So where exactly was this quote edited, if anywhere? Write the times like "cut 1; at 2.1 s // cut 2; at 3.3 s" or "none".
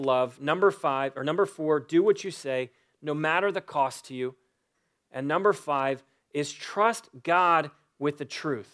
none